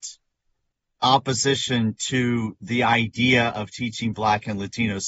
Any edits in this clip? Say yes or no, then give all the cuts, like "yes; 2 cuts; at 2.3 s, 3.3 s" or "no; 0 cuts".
no; 0 cuts